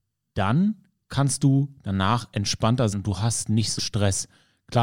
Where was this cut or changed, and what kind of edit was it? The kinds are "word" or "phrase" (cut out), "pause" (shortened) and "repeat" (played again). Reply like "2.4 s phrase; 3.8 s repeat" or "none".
2.9 s word; 3.8 s word